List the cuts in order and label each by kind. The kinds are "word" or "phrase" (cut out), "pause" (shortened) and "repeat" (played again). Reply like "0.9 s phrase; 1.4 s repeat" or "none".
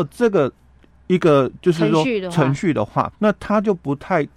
3.1 s word